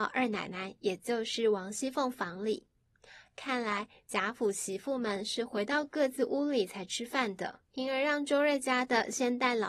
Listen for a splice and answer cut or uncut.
cut